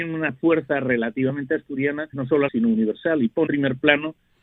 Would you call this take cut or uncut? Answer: cut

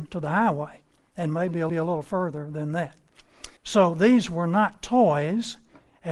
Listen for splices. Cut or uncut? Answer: cut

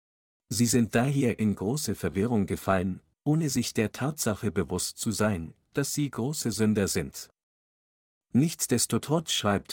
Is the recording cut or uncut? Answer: uncut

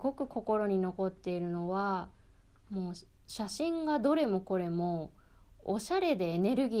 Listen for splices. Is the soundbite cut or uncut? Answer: uncut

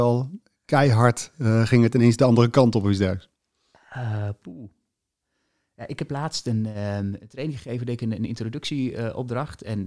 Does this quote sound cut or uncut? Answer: uncut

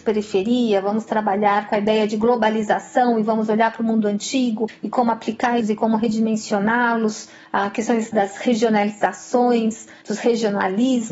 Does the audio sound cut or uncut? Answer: cut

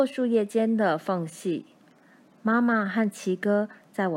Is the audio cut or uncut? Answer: uncut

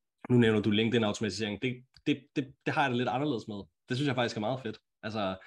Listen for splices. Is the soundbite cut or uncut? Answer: uncut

